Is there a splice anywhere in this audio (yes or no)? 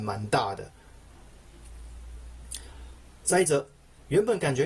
no